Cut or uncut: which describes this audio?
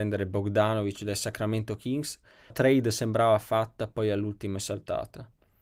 cut